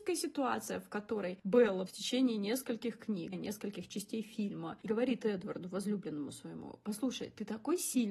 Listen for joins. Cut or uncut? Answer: cut